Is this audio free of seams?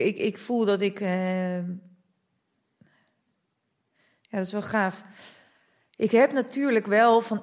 yes; 0 cuts

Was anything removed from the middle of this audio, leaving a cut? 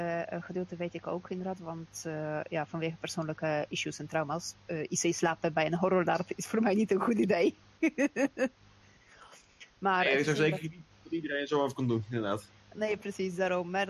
no; 0 cuts

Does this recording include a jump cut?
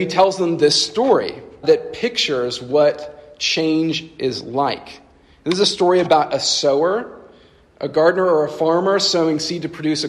yes; 1 cut; at 1.6 s

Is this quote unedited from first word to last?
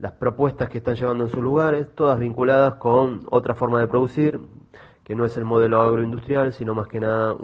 yes; 0 cuts

